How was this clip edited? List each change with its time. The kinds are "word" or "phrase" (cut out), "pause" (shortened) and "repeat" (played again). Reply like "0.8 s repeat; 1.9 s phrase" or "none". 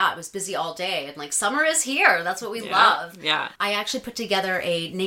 3.6 s pause